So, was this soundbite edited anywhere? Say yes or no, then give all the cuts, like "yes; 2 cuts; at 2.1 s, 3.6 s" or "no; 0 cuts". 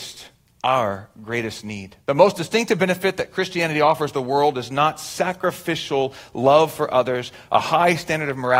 yes; 1 cut; at 2.0 s